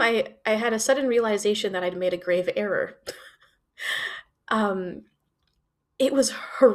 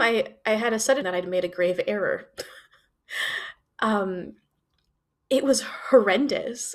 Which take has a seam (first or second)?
second